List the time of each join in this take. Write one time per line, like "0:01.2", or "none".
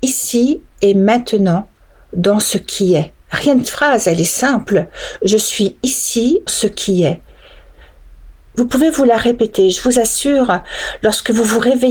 0:03.2
0:03.6
0:06.5